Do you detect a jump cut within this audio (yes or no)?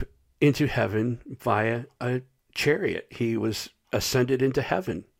no